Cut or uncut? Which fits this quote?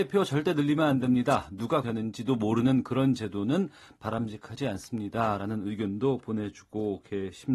cut